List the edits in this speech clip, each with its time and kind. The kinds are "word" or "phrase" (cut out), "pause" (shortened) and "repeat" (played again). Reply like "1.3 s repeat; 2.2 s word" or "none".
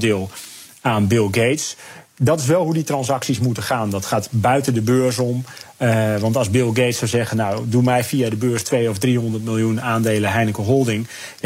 none